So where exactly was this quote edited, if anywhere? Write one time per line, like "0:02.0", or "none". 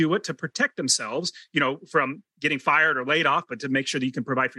none